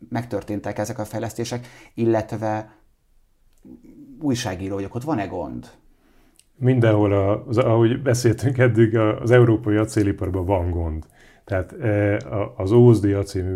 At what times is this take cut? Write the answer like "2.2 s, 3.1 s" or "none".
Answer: none